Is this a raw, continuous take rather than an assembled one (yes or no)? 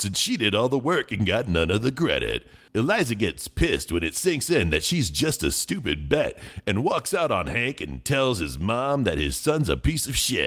yes